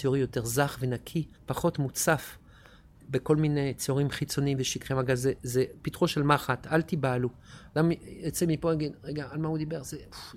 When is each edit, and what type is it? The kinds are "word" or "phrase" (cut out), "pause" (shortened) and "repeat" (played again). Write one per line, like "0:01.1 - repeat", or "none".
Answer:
0:01.3 - pause